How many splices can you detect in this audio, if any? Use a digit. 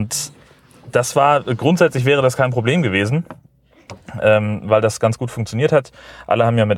0